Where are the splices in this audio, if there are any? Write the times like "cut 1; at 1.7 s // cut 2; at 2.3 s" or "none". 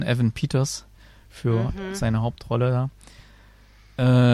none